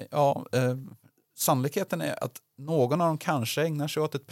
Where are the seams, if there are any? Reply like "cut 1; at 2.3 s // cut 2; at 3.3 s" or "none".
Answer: none